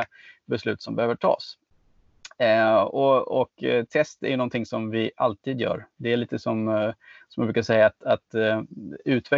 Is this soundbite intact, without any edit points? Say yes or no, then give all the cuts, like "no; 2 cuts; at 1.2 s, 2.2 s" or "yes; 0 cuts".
yes; 0 cuts